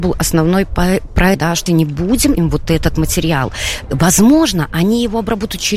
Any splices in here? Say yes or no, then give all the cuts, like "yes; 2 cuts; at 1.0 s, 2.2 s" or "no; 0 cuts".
yes; 3 cuts; at 1.3 s, 1.7 s, 2.4 s